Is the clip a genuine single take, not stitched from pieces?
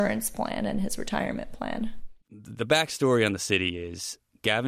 no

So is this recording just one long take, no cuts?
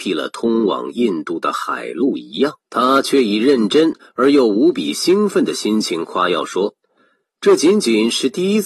no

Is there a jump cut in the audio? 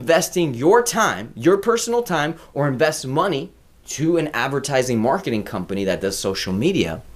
yes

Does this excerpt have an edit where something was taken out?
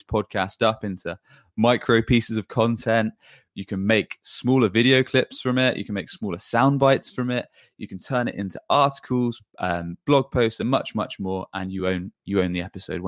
no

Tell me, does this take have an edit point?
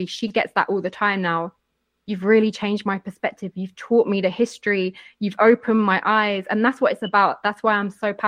no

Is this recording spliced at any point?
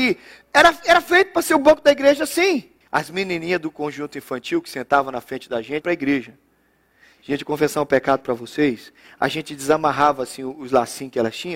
yes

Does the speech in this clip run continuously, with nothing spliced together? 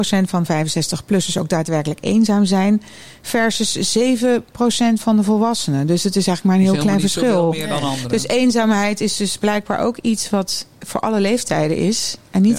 yes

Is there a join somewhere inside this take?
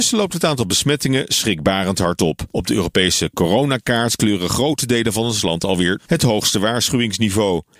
yes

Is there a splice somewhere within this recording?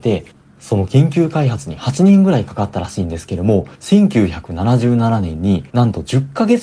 yes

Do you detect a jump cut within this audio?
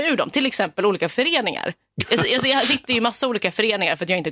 no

